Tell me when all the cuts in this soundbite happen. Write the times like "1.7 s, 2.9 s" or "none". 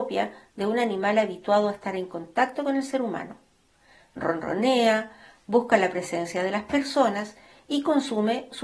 none